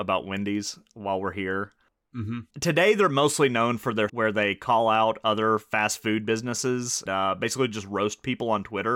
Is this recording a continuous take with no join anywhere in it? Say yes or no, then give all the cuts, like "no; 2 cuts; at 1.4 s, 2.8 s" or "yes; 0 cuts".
no; 3 cuts; at 2.5 s, 4.1 s, 7.1 s